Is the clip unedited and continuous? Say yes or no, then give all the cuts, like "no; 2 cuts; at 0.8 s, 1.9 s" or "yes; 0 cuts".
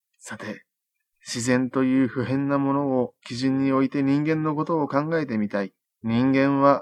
no; 1 cut; at 5.8 s